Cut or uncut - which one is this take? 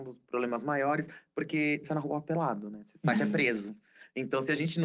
cut